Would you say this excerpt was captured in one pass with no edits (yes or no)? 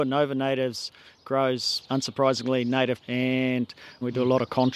no